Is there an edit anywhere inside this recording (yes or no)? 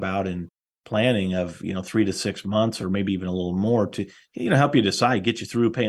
no